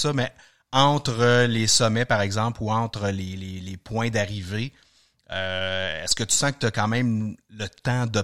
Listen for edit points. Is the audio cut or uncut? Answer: uncut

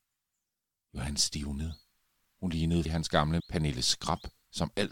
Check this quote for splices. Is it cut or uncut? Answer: cut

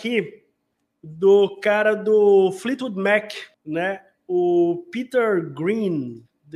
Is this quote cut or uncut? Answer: cut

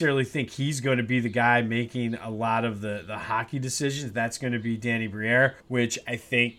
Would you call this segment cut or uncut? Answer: cut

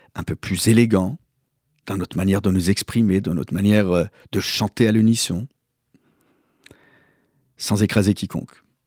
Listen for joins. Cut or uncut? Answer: uncut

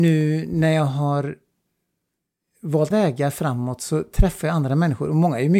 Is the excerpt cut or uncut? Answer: cut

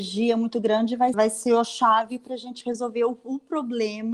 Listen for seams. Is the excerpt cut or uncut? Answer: cut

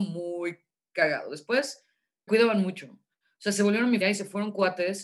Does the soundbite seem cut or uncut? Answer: cut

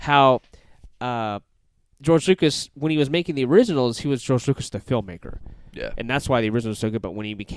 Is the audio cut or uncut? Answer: uncut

